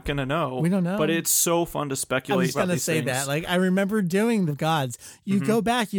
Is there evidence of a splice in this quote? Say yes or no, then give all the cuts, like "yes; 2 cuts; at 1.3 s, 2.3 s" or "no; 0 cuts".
yes; 2 cuts; at 2.5 s, 4.5 s